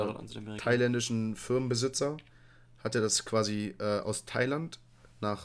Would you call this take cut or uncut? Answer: uncut